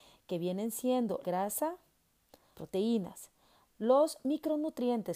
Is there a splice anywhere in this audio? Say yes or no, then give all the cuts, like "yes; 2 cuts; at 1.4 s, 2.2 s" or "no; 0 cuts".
yes; 2 cuts; at 1.2 s, 2.5 s